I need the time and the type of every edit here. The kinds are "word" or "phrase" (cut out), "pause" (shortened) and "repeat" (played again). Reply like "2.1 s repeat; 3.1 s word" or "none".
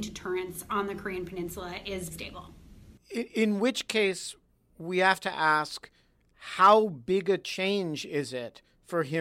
2.1 s word

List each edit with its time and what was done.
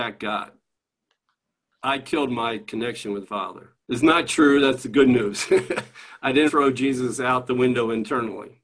3.2 s word; 3.8 s pause; 6.5 s word

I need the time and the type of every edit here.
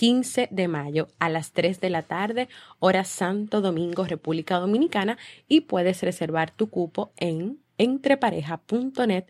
7.7 s pause

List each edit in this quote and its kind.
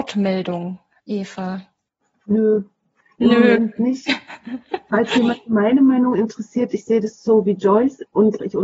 none

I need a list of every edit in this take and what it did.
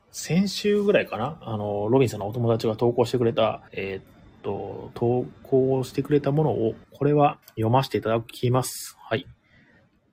3.7 s pause; 6.8 s pause; 7.4 s pause

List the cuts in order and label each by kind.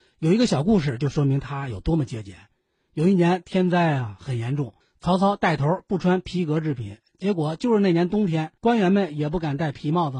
4.8 s pause; 8.6 s pause

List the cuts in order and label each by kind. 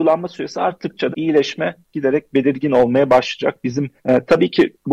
1.1 s word; 4.0 s pause

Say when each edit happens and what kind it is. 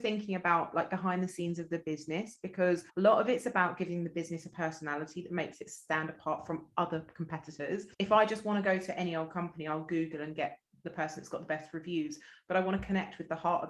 2.9 s pause; 7.9 s pause

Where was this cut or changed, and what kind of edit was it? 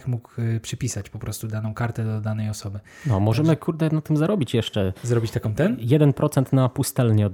none

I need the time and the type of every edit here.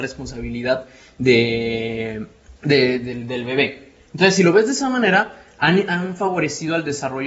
2.6 s pause

